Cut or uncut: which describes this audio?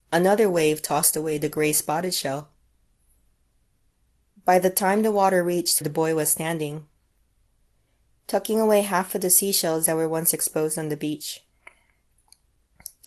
cut